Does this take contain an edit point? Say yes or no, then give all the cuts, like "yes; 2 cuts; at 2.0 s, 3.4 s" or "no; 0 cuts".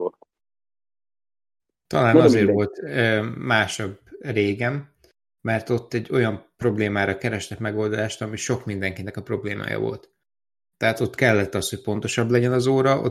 no; 0 cuts